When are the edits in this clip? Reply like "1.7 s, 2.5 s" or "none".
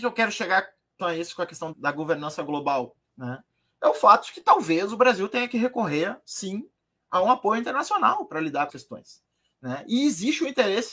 1.0 s, 1.7 s, 3.0 s, 8.7 s